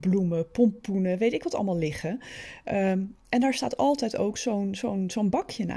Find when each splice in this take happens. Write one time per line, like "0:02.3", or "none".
none